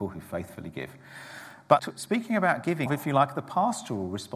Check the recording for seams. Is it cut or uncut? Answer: cut